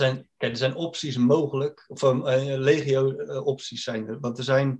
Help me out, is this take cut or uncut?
uncut